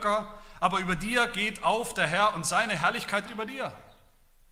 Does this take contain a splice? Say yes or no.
yes